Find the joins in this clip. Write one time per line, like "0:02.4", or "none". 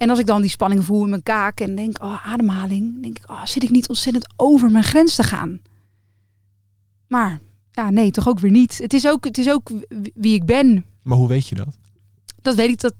none